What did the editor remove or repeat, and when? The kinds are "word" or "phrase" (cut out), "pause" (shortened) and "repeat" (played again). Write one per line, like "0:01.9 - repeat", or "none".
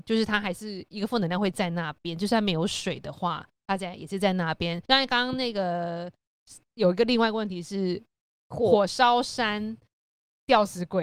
0:03.5 - pause
0:04.9 - pause